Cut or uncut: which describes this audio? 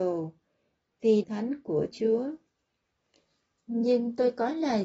cut